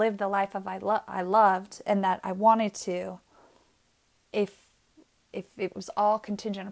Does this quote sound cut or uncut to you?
uncut